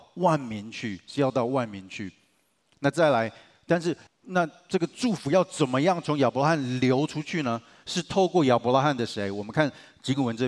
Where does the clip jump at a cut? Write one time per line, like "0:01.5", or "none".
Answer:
0:04.1

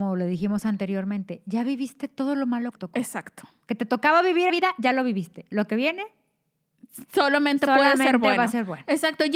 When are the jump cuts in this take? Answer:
0:02.7
0:04.5

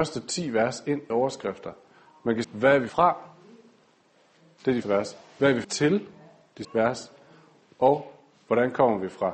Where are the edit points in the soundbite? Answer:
0:01.1
0:02.4
0:02.9
0:04.8
0:05.6
0:06.6

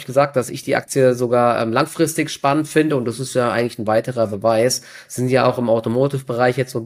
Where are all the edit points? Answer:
none

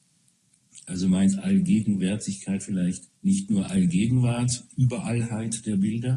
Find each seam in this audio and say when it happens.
0:03.2

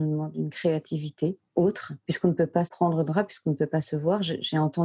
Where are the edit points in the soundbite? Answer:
0:02.0
0:02.6
0:03.1

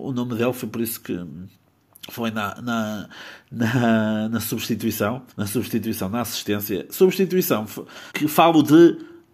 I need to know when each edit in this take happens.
0:05.3
0:08.1

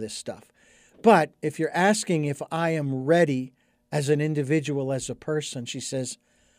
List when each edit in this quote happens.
none

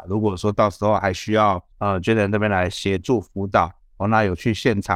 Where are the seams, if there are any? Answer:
0:01.7

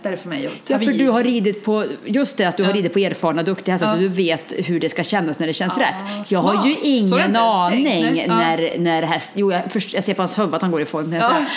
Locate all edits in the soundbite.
none

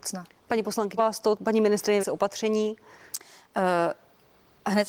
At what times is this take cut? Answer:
0:01.0
0:02.0

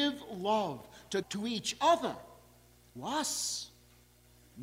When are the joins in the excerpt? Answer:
0:01.2
0:03.0

